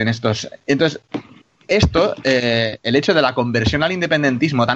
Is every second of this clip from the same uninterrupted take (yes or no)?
yes